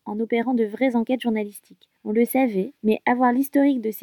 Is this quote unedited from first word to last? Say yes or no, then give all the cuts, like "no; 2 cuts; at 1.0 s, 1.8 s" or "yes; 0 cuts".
no; 2 cuts; at 2.0 s, 2.8 s